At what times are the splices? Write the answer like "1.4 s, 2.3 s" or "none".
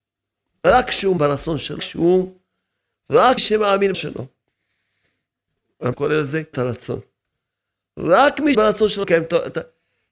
1.2 s, 1.8 s, 3.4 s, 3.9 s, 5.9 s, 6.5 s, 8.5 s, 9.0 s

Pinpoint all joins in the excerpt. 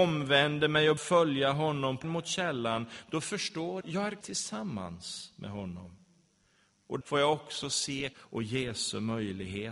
1.0 s, 2.0 s, 3.8 s, 4.2 s, 7.0 s, 8.1 s

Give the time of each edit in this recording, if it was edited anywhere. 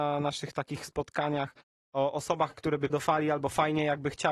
2.9 s

